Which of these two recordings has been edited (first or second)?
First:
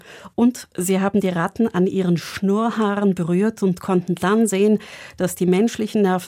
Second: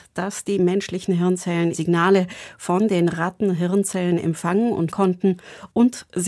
second